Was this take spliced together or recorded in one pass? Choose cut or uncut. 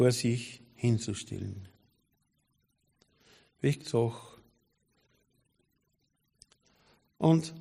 cut